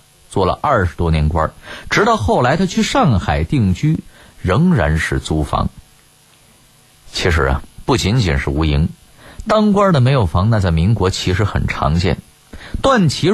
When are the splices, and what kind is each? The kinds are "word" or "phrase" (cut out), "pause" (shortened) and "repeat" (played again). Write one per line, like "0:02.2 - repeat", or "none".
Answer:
none